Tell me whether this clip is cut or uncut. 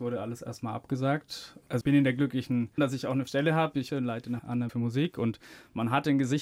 cut